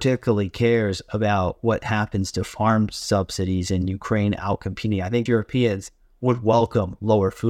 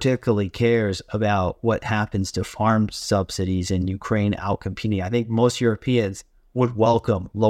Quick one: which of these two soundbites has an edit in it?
first; 1 cut; at 5.3 s

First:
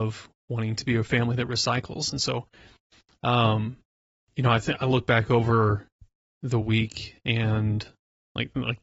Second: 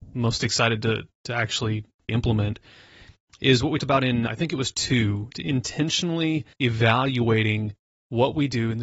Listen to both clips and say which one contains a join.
second; 6 cuts; at 2.1 s, 3.8 s, 4.3 s, 4.7 s, 5.3 s, 6.5 s

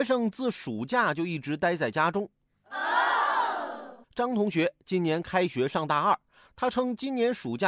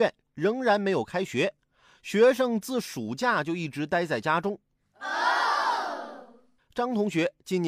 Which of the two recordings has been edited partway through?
first; 1 cut; at 4.0 s

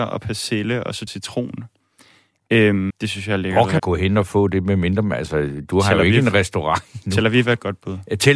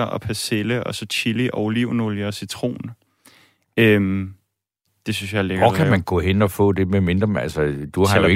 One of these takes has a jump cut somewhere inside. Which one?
first; 3 cuts; at 1.1 s, 2.9 s, 3.8 s

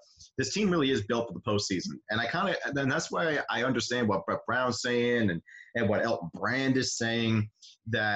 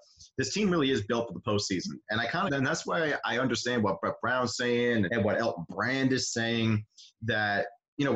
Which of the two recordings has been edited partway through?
second; 2 cuts; at 2.5 s, 5.1 s

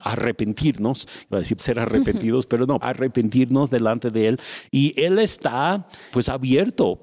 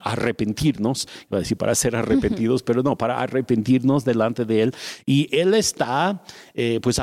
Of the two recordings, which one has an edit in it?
first; 3 cuts; at 1.6 s, 2.8 s, 6.1 s

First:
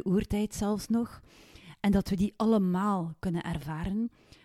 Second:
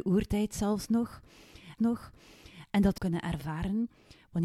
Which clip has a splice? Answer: second; 2 cuts; at 1.8 s, 3.0 s

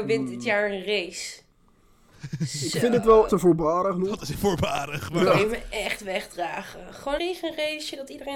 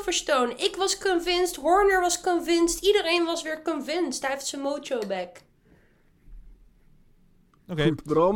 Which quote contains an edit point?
first; 3 cuts; at 3.3 s, 4.3 s, 7.2 s

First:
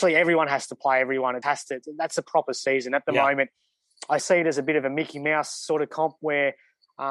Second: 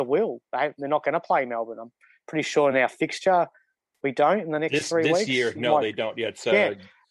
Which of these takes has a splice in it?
first; 2 cuts; at 1.4 s, 4.2 s

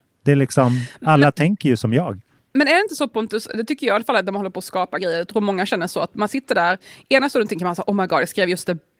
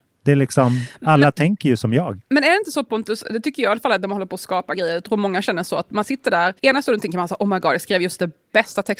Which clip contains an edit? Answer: second; 2 cuts; at 2.3 s, 6.6 s

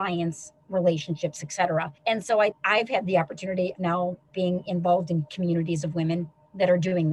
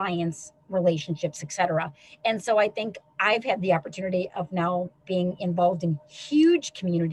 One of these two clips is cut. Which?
first; 4 cuts; at 2.0 s, 2.5 s, 3.8 s, 5.3 s

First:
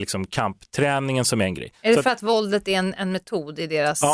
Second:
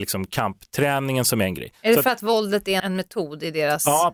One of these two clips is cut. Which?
second; 1 cut; at 2.8 s

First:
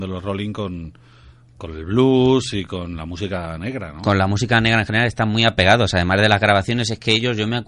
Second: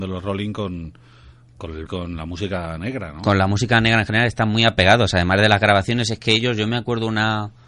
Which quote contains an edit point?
second; 1 cut; at 1.9 s

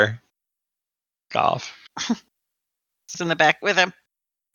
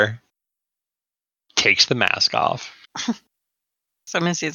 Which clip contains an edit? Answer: first; 3 cuts; at 1.3 s, 3.1 s, 3.6 s

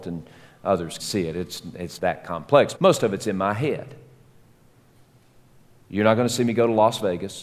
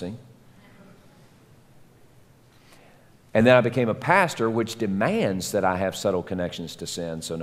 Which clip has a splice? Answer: first; 3 cuts; at 1.0 s, 2.0 s, 2.8 s

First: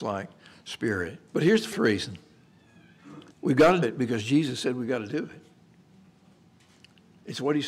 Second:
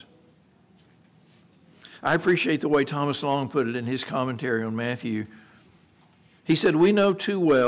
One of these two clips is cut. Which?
first; 4 cuts; at 1.3 s, 1.7 s, 3.3 s, 3.8 s

